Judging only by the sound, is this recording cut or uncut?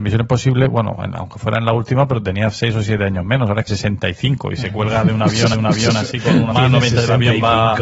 cut